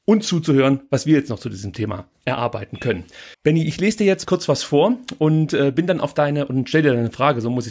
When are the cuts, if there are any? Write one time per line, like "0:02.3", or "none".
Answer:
0:03.3
0:04.2